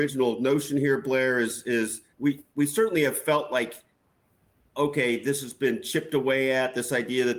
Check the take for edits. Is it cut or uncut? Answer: cut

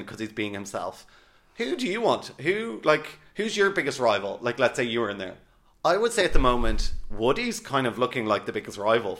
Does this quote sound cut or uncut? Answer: uncut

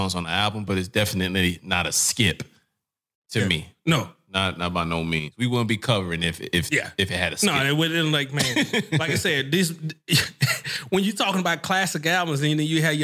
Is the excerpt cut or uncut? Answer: uncut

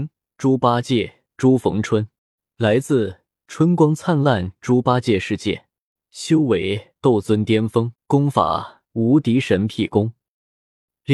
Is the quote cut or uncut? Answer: cut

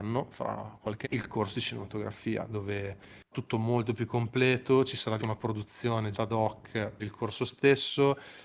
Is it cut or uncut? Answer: cut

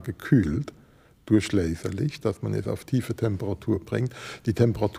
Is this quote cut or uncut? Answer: uncut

